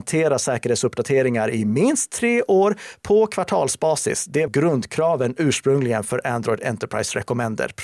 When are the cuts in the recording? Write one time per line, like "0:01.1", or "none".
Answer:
0:04.5